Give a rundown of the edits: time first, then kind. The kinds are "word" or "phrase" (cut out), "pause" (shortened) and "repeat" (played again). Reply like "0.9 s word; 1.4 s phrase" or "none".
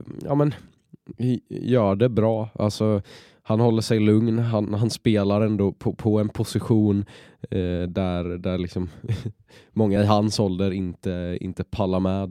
none